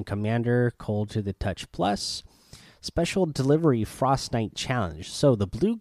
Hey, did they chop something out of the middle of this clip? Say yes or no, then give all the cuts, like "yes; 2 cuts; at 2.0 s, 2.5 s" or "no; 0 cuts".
no; 0 cuts